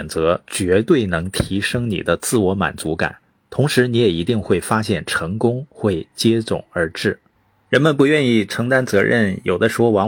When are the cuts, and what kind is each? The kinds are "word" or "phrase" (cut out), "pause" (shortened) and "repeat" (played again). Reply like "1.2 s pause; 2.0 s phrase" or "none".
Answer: 7.4 s pause